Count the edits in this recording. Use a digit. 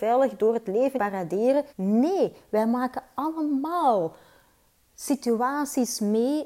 2